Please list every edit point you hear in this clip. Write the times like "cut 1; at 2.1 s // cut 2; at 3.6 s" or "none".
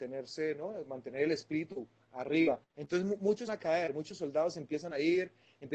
cut 1; at 2.7 s // cut 2; at 3.5 s